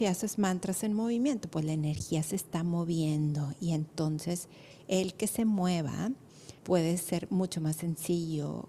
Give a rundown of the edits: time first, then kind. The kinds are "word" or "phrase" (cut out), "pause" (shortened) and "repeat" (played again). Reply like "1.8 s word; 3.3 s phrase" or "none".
6.6 s pause